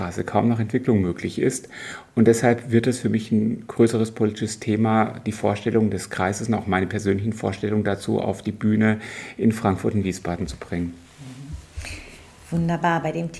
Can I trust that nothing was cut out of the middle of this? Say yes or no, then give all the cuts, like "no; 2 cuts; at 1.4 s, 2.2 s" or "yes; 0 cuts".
yes; 0 cuts